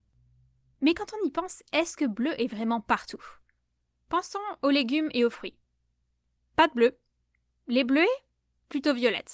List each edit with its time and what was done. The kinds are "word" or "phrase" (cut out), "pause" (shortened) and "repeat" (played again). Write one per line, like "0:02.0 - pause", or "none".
none